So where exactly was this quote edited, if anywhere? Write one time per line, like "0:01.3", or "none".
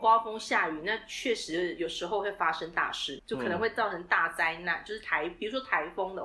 0:03.2